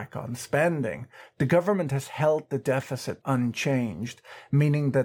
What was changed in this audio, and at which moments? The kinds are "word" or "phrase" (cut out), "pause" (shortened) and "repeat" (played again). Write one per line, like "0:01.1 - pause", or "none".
0:03.2 - word